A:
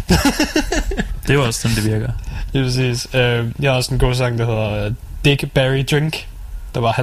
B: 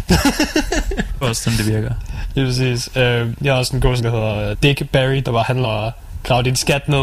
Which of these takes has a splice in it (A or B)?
B